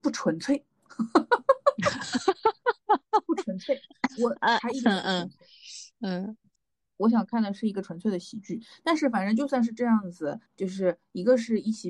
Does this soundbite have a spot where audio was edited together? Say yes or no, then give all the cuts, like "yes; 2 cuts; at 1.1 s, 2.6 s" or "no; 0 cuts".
yes; 3 cuts; at 5.9 s, 6.5 s, 10.5 s